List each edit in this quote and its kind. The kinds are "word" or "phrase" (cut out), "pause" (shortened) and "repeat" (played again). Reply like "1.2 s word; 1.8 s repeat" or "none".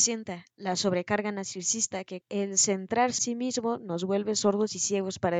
2.2 s word; 3.2 s word